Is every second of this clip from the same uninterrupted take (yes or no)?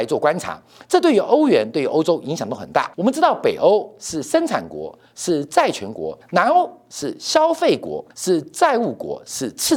no